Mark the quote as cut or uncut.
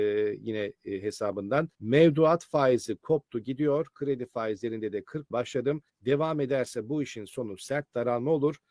cut